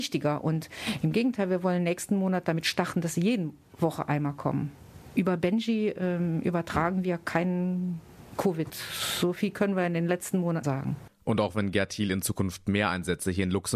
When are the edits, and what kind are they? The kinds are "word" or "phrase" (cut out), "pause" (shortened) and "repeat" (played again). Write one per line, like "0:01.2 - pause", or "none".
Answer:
0:10.6 - word